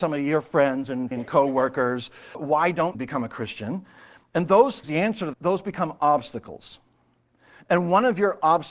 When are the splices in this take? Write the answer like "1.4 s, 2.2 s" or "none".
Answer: 1.1 s, 2.3 s, 2.9 s, 4.8 s, 5.3 s